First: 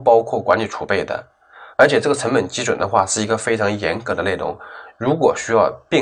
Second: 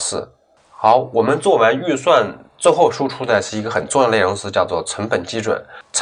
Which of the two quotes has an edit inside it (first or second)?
first